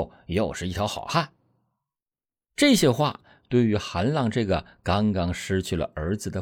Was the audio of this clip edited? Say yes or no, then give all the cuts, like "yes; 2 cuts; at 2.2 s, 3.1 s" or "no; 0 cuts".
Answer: no; 0 cuts